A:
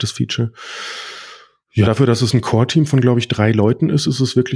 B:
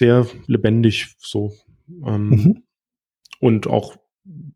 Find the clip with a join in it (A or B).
A